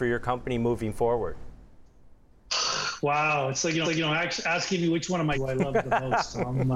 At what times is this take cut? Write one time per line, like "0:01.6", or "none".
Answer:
0:03.8
0:05.3